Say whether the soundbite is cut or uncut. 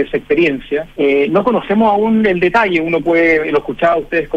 cut